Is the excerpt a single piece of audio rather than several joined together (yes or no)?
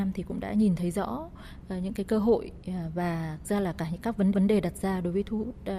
no